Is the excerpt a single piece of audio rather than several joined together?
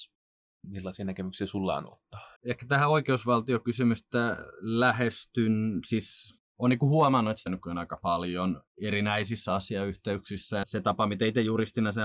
no; 4 cuts; at 2.4 s, 6.5 s, 7.5 s, 10.6 s

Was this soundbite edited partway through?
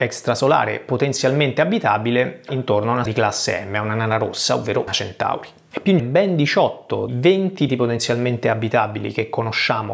yes; 6 cuts; at 2.5 s, 3.1 s, 4.9 s, 6.0 s, 7.1 s, 7.7 s

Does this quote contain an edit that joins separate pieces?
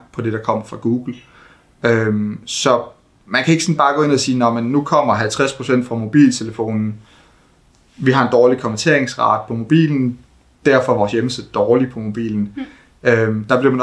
no; 0 cuts

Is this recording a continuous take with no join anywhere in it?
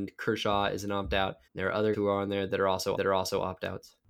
no; 3 cuts; at 1.5 s, 1.9 s, 2.9 s

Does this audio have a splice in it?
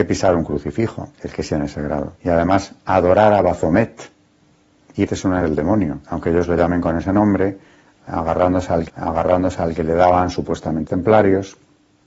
yes; 9 cuts; at 1.1 s, 1.5 s, 2.2 s, 2.8 s, 5.1 s, 5.4 s, 6.0 s, 8.9 s, 10.9 s

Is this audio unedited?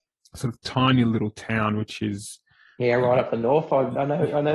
yes; 0 cuts

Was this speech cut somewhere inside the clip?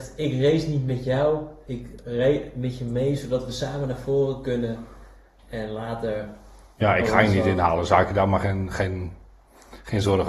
no; 0 cuts

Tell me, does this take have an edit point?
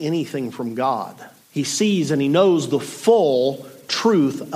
yes; 1 cut; at 1.4 s

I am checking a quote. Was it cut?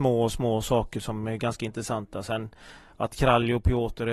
no; 0 cuts

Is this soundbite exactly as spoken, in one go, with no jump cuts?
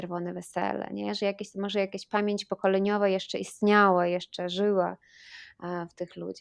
yes; 0 cuts

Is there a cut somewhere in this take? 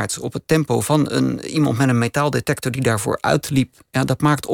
no; 0 cuts

